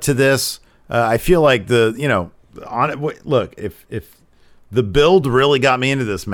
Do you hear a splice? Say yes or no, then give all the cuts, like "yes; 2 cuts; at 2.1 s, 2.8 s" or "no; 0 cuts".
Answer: no; 0 cuts